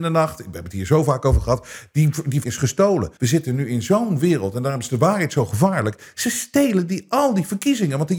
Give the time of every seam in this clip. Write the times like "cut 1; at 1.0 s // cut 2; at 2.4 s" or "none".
cut 1; at 2.4 s // cut 2; at 3.2 s